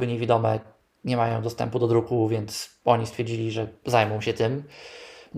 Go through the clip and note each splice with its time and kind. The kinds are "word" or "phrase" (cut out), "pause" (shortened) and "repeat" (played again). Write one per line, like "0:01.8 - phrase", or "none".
none